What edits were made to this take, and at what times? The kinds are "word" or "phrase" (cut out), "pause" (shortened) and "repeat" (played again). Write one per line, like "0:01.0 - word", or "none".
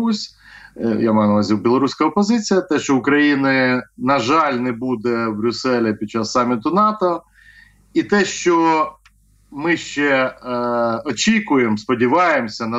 none